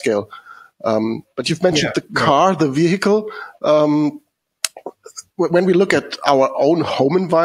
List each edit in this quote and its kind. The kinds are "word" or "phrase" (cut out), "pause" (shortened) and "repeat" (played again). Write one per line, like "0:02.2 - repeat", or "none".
none